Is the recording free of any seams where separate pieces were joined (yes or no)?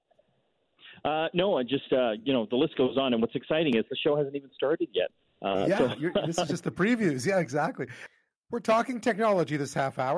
yes